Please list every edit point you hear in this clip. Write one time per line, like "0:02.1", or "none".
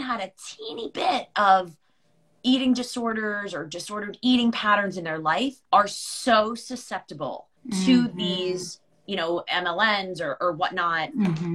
0:05.6
0:07.6